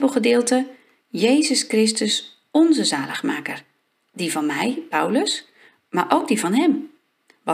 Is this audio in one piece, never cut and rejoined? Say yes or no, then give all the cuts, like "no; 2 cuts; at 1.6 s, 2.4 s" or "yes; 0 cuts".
yes; 0 cuts